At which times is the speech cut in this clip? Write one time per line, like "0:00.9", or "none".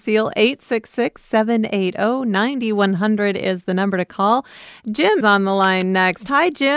0:05.2